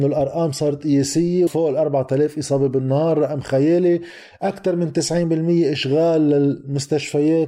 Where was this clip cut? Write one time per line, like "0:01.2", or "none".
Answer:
0:01.5